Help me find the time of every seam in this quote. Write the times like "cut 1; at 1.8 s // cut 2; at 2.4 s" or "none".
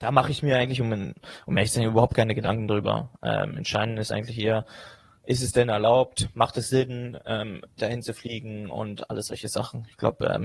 none